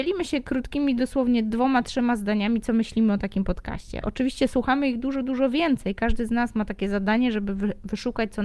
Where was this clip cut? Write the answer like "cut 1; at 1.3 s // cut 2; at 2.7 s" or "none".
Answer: none

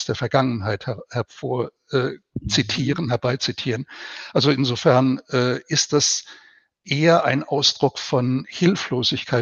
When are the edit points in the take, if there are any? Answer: none

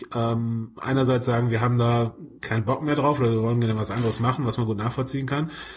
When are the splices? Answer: cut 1; at 2.4 s

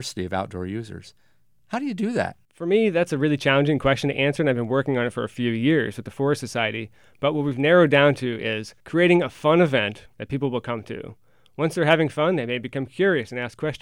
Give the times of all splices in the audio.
cut 1; at 2.4 s // cut 2; at 8.8 s // cut 3; at 10.1 s

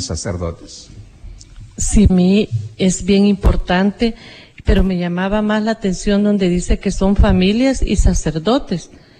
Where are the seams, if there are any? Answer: cut 1; at 2.1 s

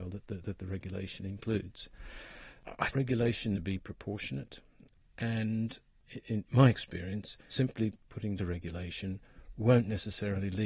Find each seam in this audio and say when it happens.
cut 1; at 2.9 s // cut 2; at 3.5 s // cut 3; at 6.4 s // cut 4; at 7.5 s // cut 5; at 8.4 s

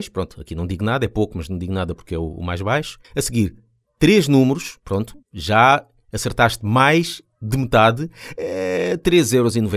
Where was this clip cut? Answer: cut 1; at 3.0 s // cut 2; at 3.8 s // cut 3; at 5.2 s

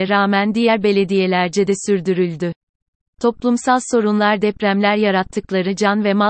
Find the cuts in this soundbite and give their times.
none

